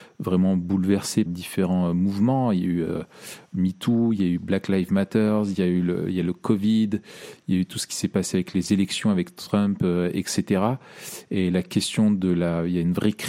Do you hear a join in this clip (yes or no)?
yes